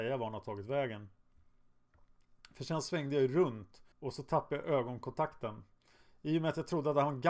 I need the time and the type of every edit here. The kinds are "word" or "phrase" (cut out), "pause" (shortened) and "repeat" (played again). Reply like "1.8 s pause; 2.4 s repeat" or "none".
3.9 s pause